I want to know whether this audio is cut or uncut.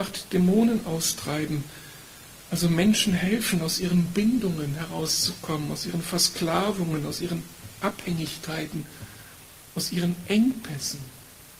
uncut